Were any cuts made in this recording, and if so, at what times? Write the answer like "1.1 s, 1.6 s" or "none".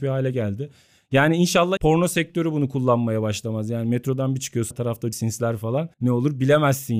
1.8 s, 4.7 s, 5.1 s, 5.9 s